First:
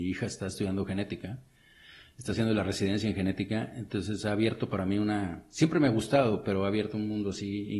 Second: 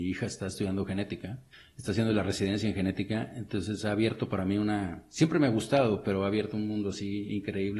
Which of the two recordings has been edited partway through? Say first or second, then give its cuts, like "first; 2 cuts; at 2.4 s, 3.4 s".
second; 1 cut; at 1.5 s